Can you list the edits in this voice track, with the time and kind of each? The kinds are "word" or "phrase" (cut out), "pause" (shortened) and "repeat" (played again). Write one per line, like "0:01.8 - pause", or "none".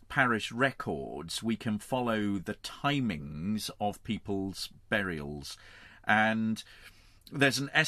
none